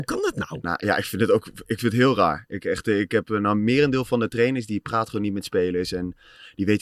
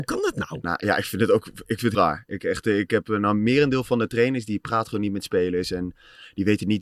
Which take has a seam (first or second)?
second